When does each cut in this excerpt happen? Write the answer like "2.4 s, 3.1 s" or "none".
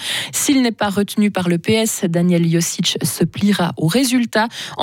none